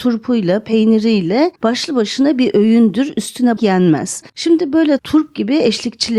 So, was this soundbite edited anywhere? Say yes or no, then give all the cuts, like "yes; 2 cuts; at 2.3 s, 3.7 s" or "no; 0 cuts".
yes; 4 cuts; at 1.6 s, 3.6 s, 4.3 s, 5.0 s